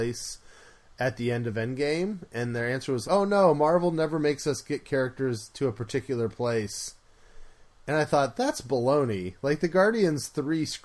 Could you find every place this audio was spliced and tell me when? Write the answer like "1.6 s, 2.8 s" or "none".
3.0 s